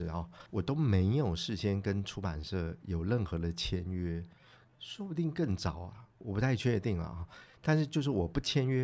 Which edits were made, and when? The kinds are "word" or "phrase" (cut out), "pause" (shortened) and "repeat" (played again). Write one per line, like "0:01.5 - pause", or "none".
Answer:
none

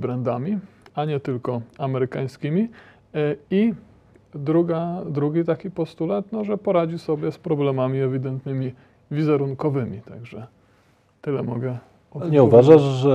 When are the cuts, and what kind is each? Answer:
none

